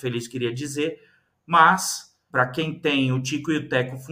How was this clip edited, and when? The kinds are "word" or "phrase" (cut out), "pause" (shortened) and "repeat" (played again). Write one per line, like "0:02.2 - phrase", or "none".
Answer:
0:02.3 - word